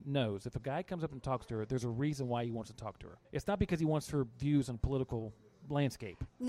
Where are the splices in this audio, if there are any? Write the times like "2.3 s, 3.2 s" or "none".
3.2 s